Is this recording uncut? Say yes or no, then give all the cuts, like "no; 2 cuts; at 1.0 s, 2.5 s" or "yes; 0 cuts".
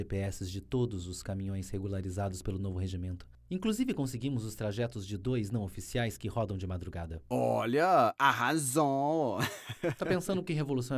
yes; 0 cuts